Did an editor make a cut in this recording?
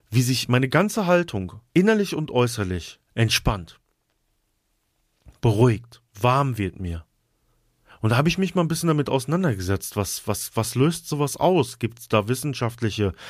yes; 4 cuts; at 1.7 s, 3.1 s, 6.1 s, 7.6 s

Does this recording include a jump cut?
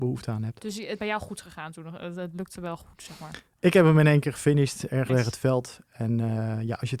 yes; 2 cuts; at 1.0 s, 5.1 s

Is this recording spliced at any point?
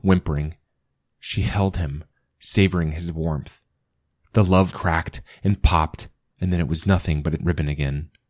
yes; 2 cuts; at 4.7 s, 7.4 s

